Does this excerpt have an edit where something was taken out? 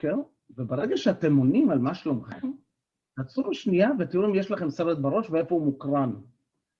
no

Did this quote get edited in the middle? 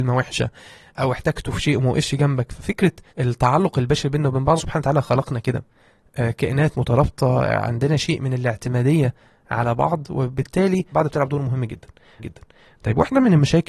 yes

